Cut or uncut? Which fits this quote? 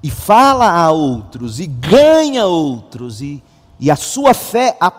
uncut